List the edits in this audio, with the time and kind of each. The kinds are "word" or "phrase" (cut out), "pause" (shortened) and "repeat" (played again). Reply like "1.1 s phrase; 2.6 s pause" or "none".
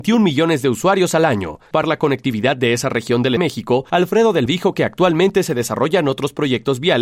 1.8 s word; 3.4 s phrase; 4.5 s word